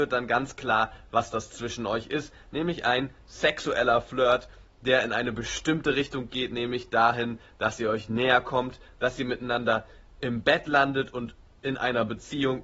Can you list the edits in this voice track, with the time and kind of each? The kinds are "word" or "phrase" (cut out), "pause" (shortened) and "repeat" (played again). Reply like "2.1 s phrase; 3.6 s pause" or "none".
none

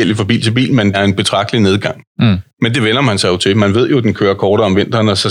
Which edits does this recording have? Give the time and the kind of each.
0.9 s word

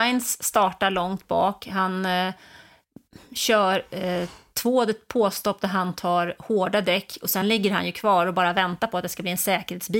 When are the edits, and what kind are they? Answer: none

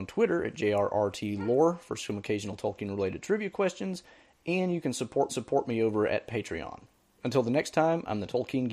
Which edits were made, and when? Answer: 5.3 s repeat

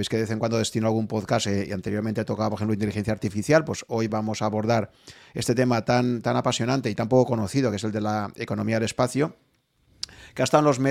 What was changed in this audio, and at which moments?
none

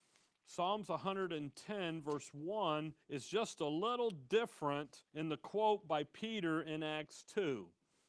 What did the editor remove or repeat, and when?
3.0 s pause; 5.1 s pause

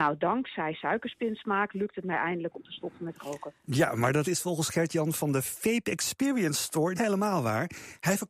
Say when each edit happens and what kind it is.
4.2 s word; 7.0 s word

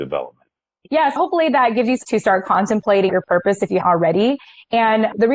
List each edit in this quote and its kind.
1.2 s word; 2.0 s word; 3.1 s word; 3.8 s word

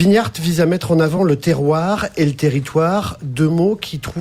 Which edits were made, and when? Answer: none

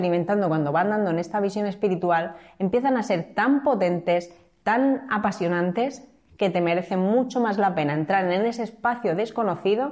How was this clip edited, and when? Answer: none

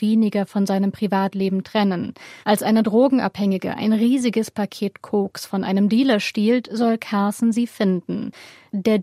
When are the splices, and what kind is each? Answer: 2.4 s pause

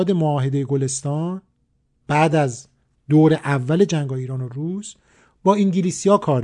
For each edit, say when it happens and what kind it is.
none

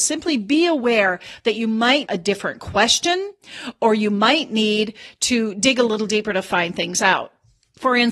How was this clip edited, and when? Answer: 2.1 s word

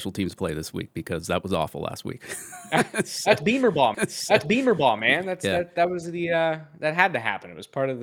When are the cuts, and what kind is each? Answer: 3.9 s repeat

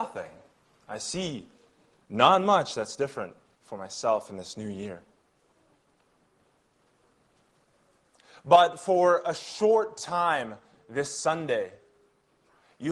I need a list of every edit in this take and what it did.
none

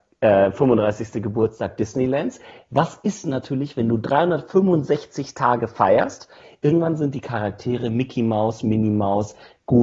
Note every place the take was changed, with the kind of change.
none

